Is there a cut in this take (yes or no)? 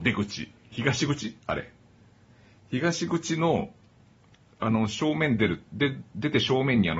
no